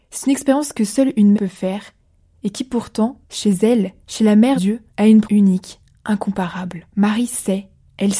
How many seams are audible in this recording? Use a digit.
7